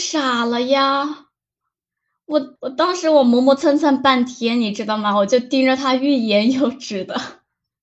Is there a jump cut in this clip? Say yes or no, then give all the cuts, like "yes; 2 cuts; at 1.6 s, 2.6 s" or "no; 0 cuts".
yes; 1 cut; at 2.6 s